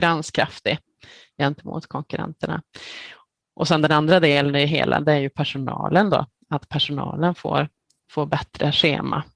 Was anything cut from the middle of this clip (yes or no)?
no